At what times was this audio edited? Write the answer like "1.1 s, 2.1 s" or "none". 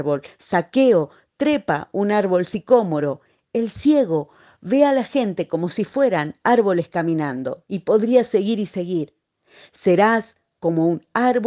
none